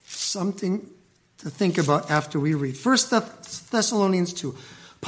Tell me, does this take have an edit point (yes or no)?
no